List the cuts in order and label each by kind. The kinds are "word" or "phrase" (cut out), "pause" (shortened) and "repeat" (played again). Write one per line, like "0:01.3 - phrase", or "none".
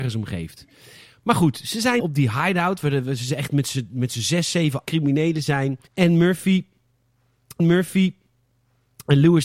0:02.0 - word
0:04.9 - word
0:05.9 - pause
0:07.6 - repeat